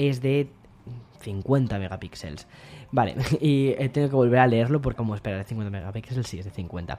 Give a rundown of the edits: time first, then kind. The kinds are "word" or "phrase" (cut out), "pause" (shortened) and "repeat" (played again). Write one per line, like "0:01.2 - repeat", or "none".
0:05.0 - word